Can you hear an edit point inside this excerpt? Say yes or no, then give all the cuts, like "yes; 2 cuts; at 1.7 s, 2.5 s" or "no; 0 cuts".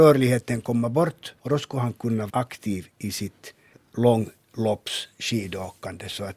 yes; 3 cuts; at 1.4 s, 2.3 s, 3.7 s